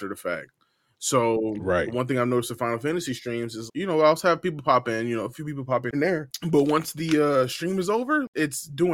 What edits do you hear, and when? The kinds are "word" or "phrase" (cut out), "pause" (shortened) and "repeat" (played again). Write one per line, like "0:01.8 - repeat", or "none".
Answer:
0:03.7 - word
0:05.9 - word